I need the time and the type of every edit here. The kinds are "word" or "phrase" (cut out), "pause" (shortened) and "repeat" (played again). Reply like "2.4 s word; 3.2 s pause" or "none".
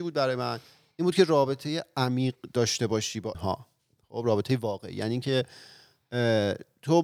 3.3 s word